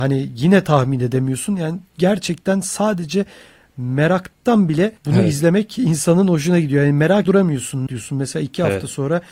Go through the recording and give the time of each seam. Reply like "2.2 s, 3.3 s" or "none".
1.9 s, 5.0 s, 7.3 s, 7.9 s